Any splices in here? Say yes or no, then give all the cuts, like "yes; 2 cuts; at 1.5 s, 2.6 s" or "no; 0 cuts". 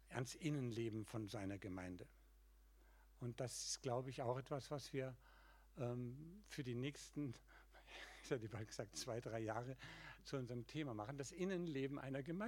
no; 0 cuts